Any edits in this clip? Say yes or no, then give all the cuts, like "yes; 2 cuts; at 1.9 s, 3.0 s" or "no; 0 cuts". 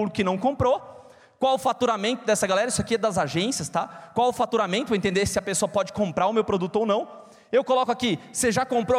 no; 0 cuts